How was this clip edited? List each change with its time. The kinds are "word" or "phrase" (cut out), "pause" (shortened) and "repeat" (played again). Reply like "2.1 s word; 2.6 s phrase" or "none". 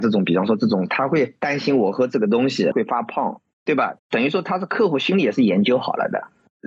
4.0 s pause